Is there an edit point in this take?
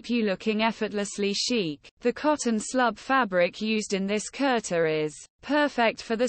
yes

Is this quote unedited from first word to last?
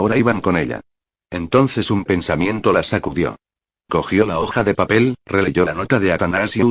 yes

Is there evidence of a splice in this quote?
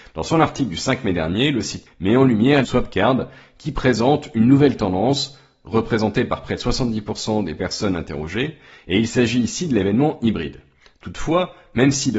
yes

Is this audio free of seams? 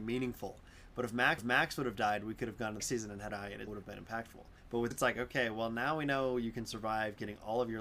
no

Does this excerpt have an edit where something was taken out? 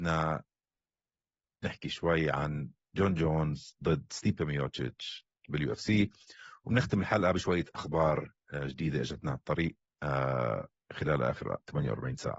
no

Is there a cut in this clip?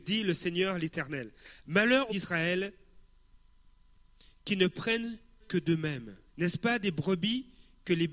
yes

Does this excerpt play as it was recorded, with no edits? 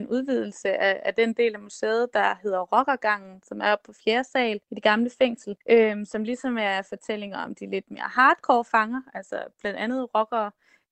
no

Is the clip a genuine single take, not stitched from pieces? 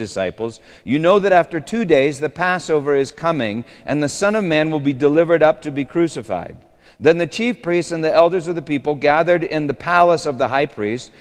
yes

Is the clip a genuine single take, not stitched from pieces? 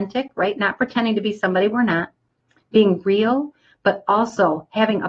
yes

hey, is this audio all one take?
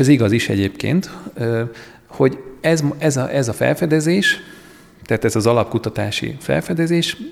yes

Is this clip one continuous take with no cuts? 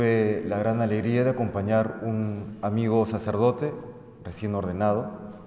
yes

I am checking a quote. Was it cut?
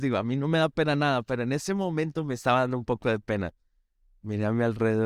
no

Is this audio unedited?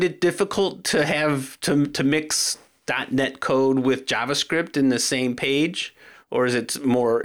yes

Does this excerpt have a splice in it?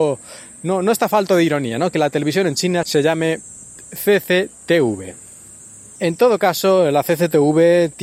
no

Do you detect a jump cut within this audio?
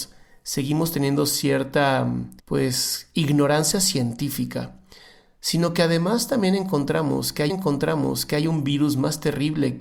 yes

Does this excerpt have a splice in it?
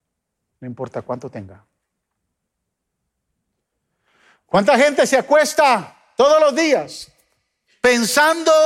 no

